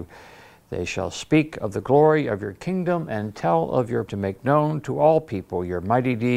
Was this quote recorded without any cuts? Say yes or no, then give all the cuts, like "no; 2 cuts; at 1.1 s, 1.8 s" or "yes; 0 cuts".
no; 1 cut; at 4.1 s